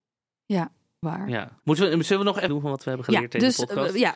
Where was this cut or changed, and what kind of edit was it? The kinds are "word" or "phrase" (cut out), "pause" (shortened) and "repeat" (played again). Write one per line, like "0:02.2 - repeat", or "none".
0:01.0 - word
0:01.6 - pause
0:02.5 - phrase